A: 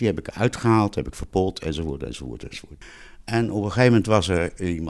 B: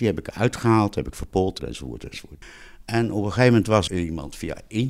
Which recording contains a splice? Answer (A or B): B